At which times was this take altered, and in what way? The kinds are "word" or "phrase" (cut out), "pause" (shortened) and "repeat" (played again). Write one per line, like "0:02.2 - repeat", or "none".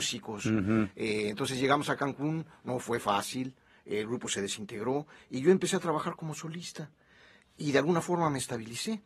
none

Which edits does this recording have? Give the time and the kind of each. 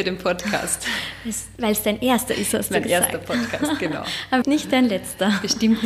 0:04.4 - word

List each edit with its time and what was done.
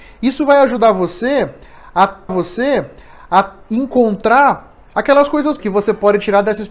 0:02.3 - repeat
0:05.6 - word

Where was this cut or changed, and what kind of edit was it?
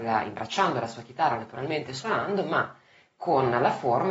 none

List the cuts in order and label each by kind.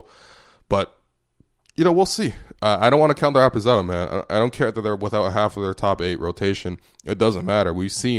none

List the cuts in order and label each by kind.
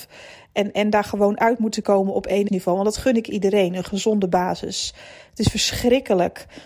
0:01.8 - word
0:02.5 - word

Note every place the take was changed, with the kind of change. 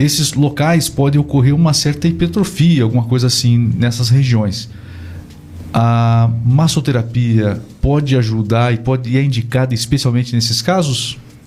none

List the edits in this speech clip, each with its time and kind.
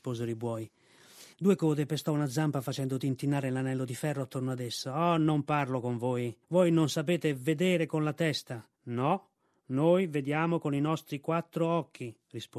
0:01.3 - pause
0:06.4 - pause
0:08.7 - pause

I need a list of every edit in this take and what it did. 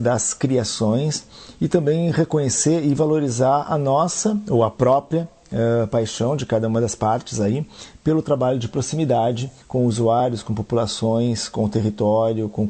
0:09.6 - pause

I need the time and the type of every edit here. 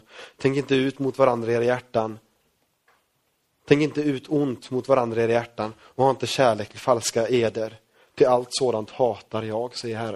none

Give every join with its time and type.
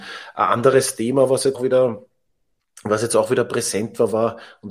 0:01.5 - word

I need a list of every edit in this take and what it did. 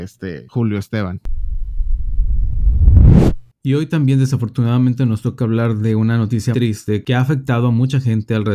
0:06.5 - word

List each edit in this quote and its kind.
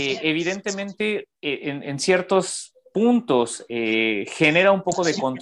0:01.4 - pause

